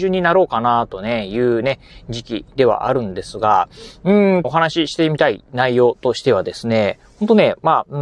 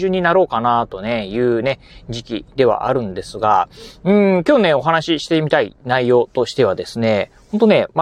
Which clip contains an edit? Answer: first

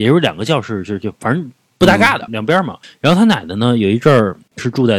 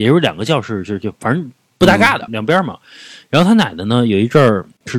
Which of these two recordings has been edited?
first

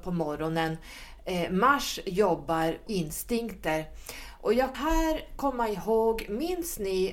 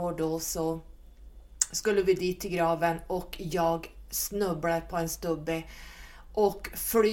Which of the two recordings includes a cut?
first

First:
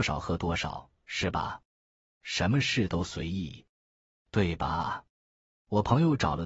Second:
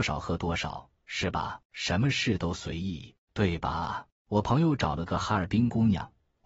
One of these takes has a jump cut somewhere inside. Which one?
second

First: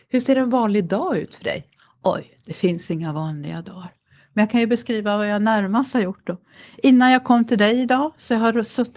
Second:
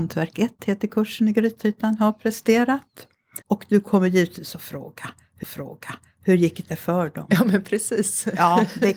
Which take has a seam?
second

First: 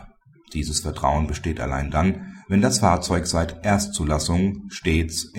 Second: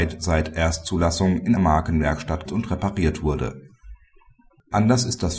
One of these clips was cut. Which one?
second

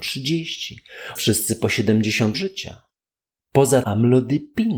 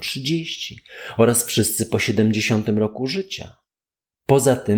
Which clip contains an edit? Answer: first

